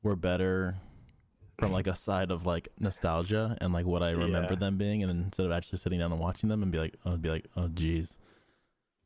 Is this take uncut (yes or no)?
no